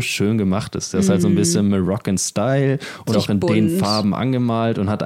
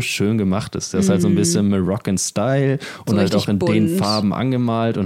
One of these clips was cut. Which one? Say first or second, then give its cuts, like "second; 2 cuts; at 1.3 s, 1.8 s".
first; 1 cut; at 3.1 s